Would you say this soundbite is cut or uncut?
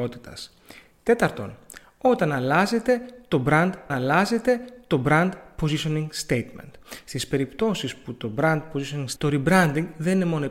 cut